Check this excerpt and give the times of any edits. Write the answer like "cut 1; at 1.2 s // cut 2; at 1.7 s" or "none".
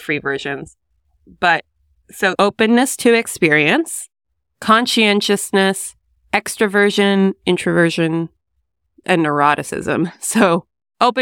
cut 1; at 2.3 s // cut 2; at 9.0 s